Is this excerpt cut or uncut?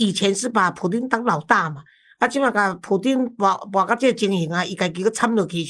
uncut